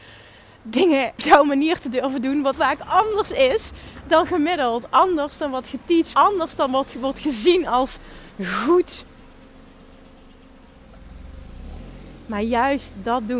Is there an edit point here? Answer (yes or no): yes